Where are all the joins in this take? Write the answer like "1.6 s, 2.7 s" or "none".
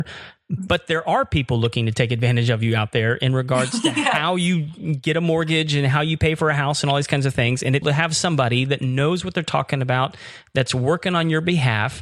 7.8 s